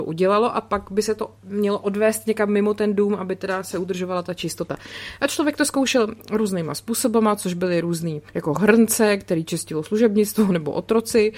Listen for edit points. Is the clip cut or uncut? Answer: cut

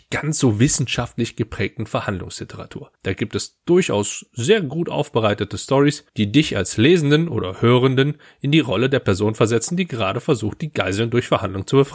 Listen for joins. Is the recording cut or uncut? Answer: cut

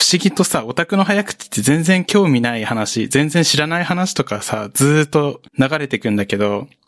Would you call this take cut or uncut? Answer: cut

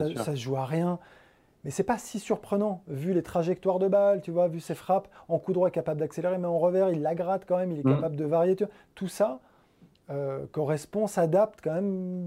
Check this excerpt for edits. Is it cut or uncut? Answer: uncut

